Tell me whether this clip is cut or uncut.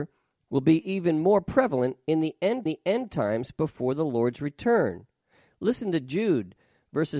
cut